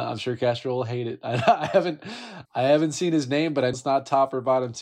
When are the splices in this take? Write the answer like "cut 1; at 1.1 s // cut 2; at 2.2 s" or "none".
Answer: cut 1; at 2.5 s // cut 2; at 3.7 s